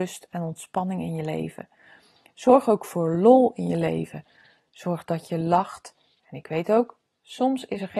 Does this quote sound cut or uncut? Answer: uncut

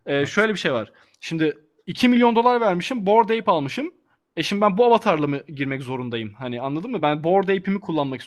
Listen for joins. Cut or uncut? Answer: uncut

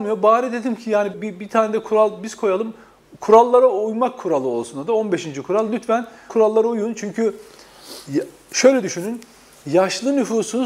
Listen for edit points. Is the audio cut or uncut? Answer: cut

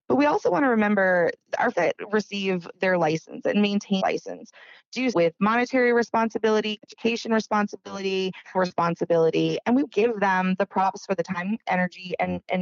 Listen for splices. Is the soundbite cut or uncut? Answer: cut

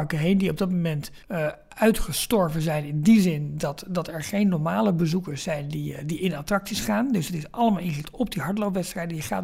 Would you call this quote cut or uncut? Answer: cut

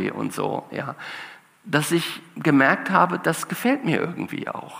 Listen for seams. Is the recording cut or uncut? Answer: uncut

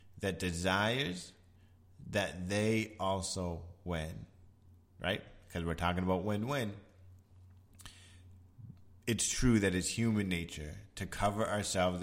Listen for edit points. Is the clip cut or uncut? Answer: uncut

